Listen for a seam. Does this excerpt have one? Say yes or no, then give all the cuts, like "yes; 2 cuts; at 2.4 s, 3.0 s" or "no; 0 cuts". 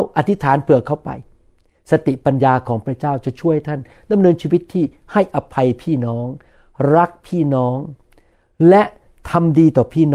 no; 0 cuts